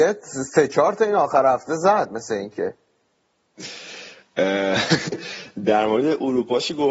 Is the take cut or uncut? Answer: uncut